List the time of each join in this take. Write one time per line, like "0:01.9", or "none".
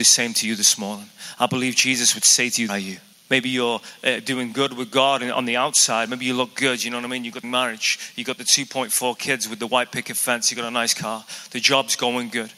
0:02.7
0:03.1
0:07.4